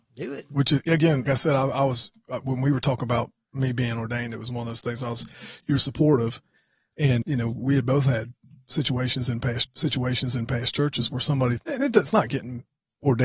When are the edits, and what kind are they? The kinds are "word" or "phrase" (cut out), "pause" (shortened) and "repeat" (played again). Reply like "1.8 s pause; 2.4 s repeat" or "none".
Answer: 1.3 s word; 5.8 s word; 7.2 s word; 9.6 s repeat; 11.6 s word

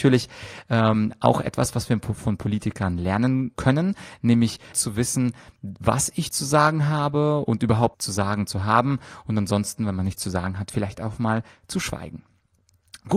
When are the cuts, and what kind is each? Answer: 3.5 s word; 4.7 s word; 7.9 s word

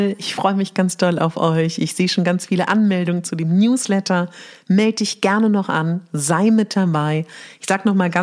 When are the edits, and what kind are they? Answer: none

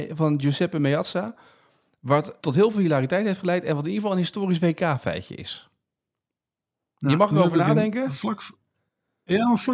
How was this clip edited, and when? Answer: 2.4 s word

